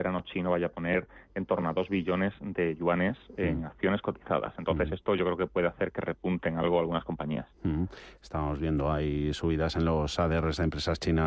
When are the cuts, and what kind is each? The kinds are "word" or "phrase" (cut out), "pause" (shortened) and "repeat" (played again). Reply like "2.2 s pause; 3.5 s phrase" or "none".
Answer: none